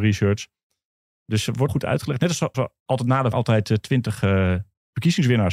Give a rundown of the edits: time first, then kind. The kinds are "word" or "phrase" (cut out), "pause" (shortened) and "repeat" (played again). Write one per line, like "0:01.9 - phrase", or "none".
0:01.7 - word
0:02.5 - word
0:03.3 - word